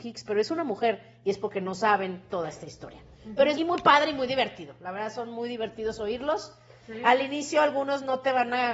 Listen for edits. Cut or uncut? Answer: cut